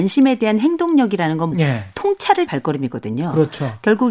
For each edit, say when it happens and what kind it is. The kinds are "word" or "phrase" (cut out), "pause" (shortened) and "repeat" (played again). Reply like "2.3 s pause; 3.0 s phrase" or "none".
1.5 s phrase; 2.5 s word